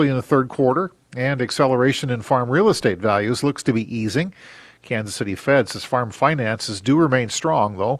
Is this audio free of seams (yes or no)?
yes